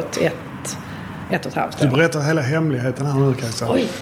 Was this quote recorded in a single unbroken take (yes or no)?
yes